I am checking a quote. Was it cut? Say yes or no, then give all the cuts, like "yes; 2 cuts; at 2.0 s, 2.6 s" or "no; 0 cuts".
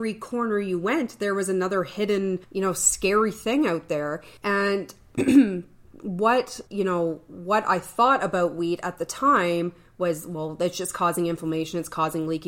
yes; 3 cuts; at 2.4 s, 4.4 s, 6.7 s